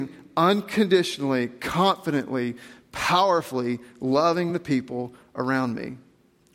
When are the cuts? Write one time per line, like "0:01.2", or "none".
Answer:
none